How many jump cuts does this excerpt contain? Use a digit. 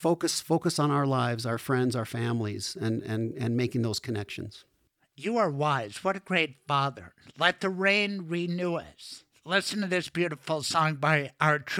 0